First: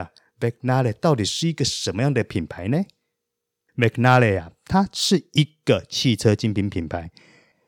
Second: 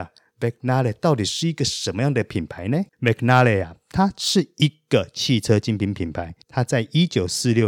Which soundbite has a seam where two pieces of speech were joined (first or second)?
second